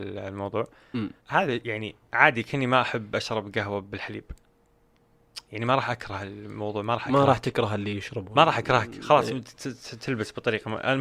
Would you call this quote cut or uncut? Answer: cut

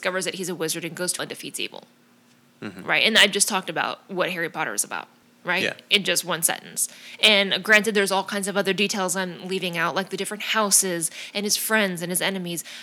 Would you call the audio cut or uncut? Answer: cut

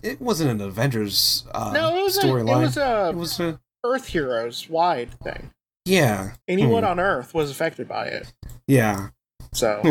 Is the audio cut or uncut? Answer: cut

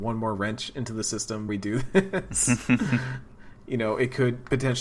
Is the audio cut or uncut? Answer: cut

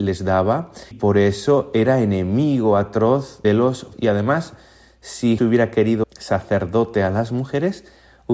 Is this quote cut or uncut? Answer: cut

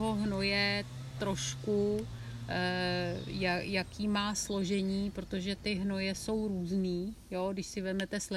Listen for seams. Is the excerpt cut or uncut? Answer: uncut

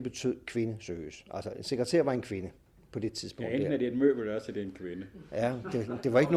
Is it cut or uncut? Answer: uncut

